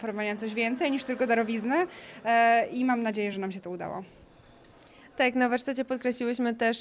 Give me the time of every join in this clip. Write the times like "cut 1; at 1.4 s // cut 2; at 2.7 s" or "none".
none